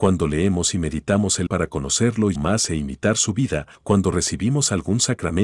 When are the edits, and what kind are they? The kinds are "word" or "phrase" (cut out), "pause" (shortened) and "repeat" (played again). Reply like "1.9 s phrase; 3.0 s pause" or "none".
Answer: 1.5 s word; 2.4 s word; 3.7 s pause

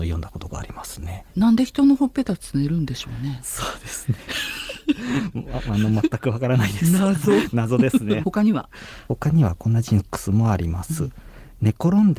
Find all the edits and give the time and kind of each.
1.3 s pause; 8.2 s phrase

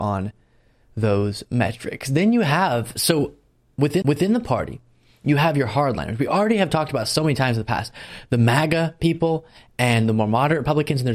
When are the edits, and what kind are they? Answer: 4.0 s repeat

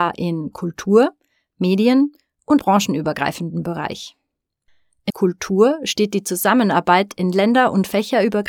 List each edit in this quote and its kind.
2.6 s word; 5.1 s word

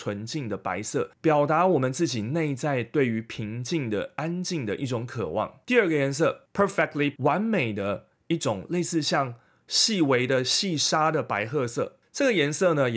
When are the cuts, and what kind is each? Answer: 1.1 s pause; 7.2 s word

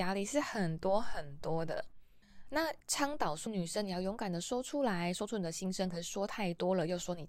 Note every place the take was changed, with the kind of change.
3.5 s word

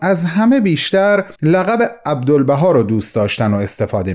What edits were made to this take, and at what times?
1.4 s pause

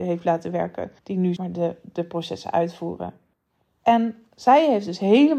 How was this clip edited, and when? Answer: 1.0 s pause; 1.4 s word; 3.3 s pause

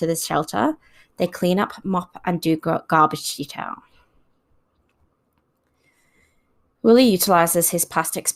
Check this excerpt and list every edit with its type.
none

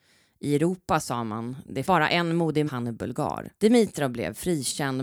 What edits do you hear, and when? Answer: 1.8 s word; 2.7 s phrase; 3.6 s pause

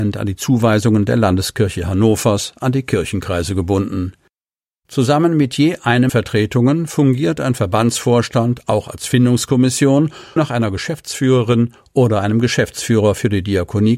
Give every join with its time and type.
6.1 s phrase; 10.4 s word

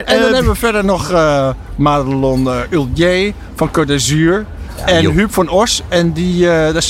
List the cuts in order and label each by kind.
none

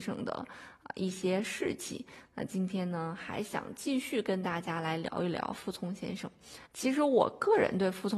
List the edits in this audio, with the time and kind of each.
6.7 s pause

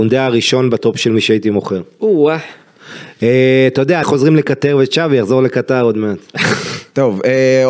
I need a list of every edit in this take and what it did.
4.0 s word

